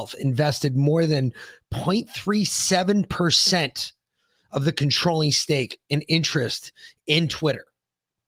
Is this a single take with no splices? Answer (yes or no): yes